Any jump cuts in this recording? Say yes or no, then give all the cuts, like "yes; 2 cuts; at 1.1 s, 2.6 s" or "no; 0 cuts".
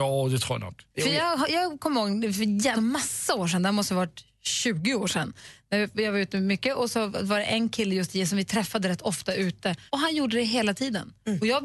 yes; 3 cuts; at 0.9 s, 2.7 s, 9.9 s